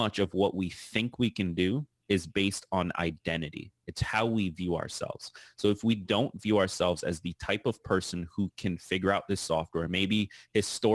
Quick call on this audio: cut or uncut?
uncut